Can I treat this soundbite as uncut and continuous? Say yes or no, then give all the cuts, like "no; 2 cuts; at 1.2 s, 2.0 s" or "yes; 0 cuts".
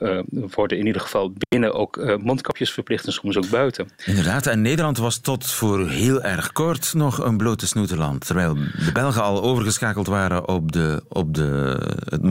yes; 0 cuts